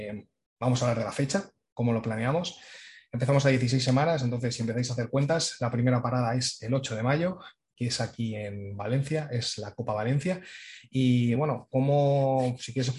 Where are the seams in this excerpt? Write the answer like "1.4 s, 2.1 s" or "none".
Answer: none